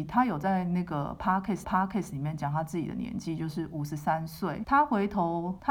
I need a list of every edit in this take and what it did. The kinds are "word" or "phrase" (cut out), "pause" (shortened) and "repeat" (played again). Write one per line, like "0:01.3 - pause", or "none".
0:01.6 - repeat

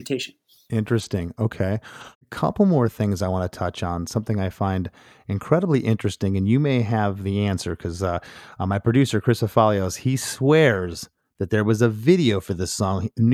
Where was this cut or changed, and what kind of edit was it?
none

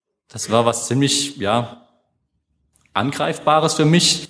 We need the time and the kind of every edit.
none

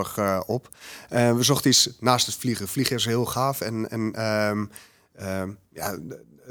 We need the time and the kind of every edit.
none

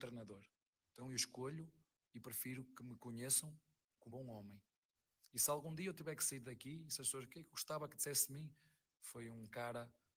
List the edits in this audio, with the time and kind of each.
0:04.1 - word

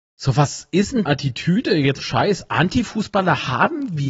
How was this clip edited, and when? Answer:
0:01.1 - phrase
0:02.0 - phrase

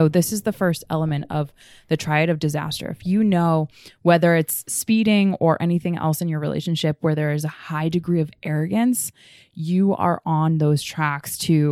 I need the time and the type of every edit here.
none

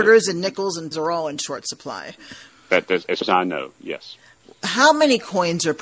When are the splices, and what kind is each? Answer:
0:00.9 - word
0:03.2 - word

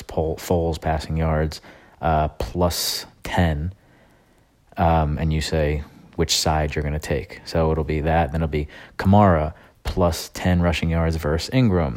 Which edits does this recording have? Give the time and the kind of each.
none

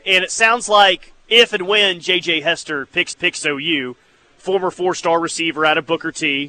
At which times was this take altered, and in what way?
0:01.1 - word
0:03.1 - repeat

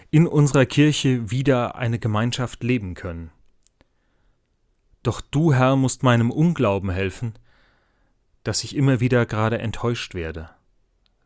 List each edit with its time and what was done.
none

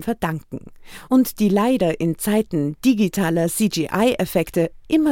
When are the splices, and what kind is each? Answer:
none

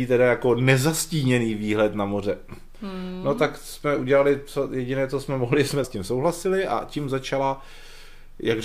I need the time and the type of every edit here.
0:05.8 - word

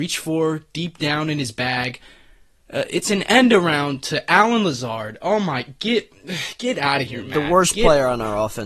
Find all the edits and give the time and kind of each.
none

